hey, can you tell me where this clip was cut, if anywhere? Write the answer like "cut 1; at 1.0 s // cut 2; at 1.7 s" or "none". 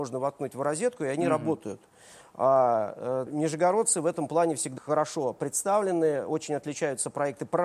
cut 1; at 3.3 s // cut 2; at 4.8 s